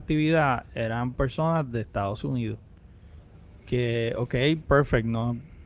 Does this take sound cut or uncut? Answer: uncut